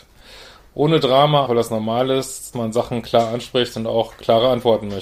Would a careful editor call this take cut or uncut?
cut